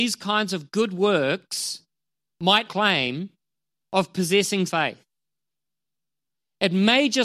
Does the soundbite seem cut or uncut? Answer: cut